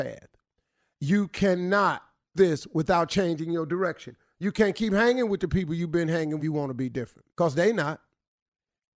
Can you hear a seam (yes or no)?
yes